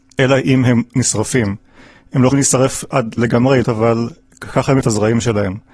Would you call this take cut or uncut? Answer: cut